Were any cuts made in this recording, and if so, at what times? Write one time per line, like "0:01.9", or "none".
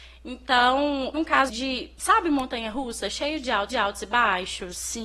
0:01.1
0:01.5
0:03.7